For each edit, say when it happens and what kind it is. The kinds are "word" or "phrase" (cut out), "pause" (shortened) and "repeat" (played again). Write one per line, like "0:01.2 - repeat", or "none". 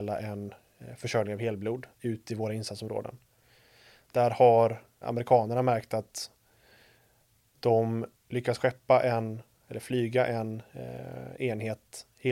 0:01.9 - pause
0:05.0 - word
0:08.1 - phrase